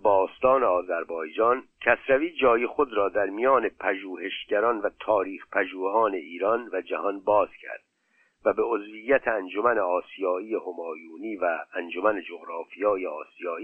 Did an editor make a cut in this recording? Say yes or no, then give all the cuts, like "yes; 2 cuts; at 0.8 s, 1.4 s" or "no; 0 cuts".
no; 0 cuts